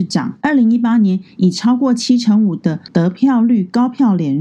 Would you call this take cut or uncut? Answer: cut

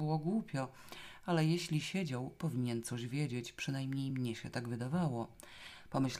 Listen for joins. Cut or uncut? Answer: uncut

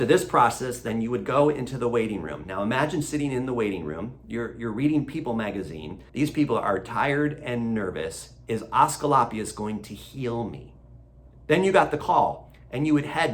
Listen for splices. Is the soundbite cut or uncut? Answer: cut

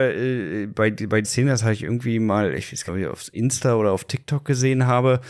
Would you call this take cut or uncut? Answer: cut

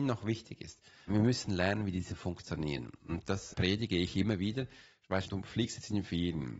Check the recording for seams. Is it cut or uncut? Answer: cut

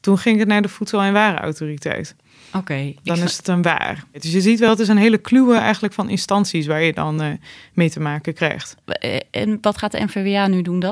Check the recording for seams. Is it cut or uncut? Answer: uncut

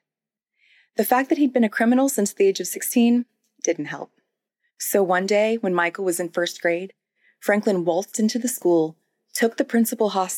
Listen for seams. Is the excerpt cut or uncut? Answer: uncut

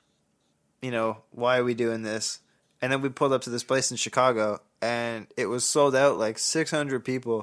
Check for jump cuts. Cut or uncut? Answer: uncut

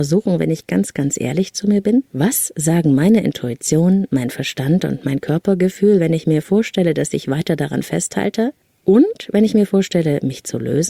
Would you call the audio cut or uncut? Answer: cut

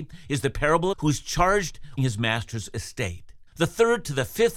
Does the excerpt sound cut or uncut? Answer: cut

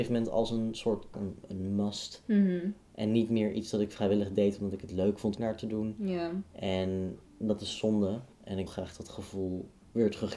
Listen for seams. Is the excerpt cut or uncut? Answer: cut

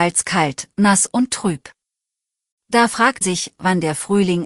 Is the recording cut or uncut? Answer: cut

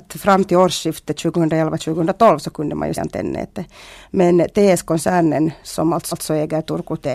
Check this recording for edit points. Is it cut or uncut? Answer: cut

